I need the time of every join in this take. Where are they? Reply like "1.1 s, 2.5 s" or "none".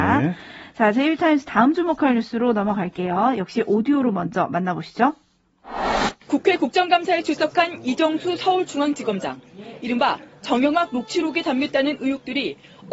6.2 s

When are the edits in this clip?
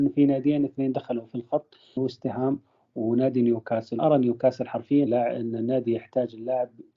2.0 s, 4.0 s, 5.1 s

